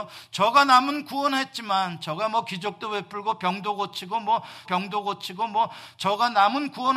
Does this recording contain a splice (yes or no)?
yes